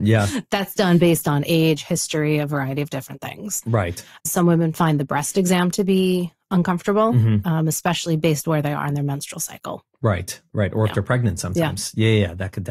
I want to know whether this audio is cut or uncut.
uncut